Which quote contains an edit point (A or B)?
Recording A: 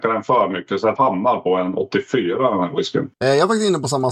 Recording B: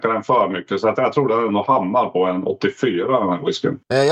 A